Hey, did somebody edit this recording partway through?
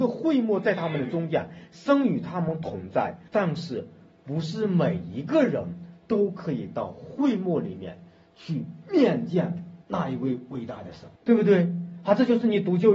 yes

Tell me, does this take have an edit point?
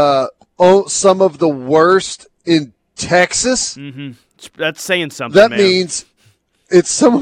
no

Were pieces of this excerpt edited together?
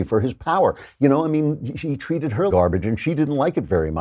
yes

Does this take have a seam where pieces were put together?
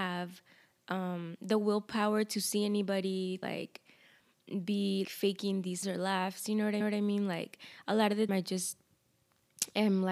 yes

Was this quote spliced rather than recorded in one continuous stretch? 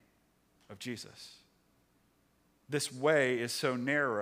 no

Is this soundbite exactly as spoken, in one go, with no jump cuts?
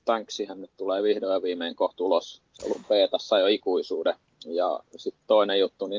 yes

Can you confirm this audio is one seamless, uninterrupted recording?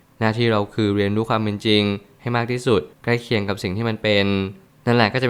no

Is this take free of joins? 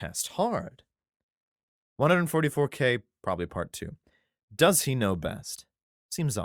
yes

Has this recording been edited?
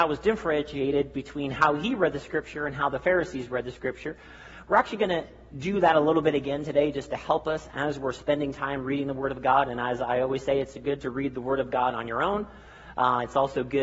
no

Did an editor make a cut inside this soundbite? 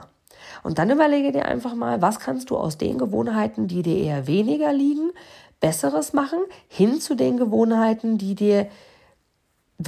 no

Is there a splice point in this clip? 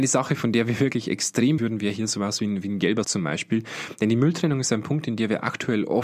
yes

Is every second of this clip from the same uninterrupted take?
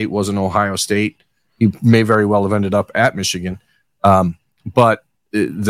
yes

